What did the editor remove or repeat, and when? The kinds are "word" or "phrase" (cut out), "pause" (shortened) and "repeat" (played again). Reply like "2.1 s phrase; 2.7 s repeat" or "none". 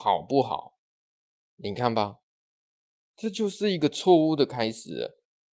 none